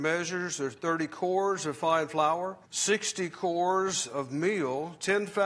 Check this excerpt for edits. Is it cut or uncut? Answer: cut